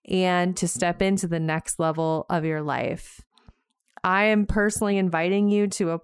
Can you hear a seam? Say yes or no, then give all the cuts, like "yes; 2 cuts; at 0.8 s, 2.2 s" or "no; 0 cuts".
no; 0 cuts